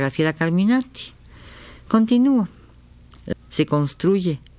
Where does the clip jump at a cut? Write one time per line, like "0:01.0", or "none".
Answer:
0:03.3